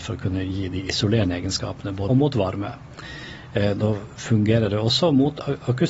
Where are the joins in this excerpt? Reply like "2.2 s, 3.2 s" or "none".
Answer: 2.1 s